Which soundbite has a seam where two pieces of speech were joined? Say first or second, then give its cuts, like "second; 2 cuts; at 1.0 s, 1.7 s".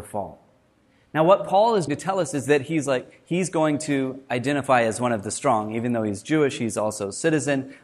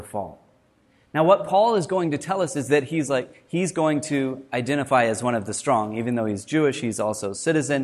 first; 1 cut; at 1.9 s